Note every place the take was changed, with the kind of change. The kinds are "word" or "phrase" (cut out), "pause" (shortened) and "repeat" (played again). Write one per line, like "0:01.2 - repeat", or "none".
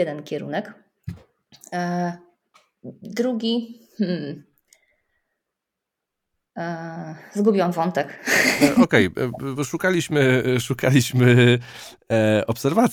0:03.9 - pause